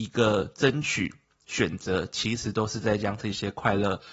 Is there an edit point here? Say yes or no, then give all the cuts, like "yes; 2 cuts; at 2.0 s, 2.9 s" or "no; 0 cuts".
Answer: no; 0 cuts